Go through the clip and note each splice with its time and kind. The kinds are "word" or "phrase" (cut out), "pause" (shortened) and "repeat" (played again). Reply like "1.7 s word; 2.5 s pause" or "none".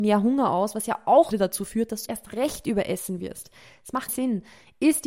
1.3 s word; 2.1 s word; 4.1 s word